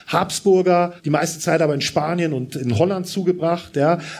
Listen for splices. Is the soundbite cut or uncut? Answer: cut